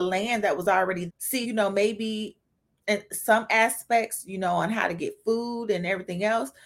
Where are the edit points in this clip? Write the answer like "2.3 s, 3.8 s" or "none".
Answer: 1.1 s, 1.4 s